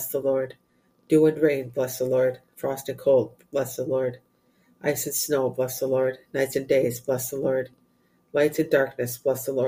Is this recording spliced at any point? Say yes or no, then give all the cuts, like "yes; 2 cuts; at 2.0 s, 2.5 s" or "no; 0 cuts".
no; 0 cuts